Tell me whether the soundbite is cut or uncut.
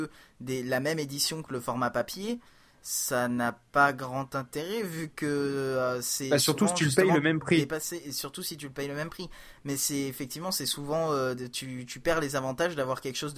uncut